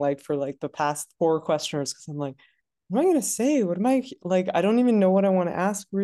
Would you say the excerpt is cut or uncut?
uncut